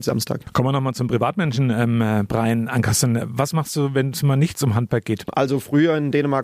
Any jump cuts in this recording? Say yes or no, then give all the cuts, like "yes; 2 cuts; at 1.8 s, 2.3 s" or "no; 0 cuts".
no; 0 cuts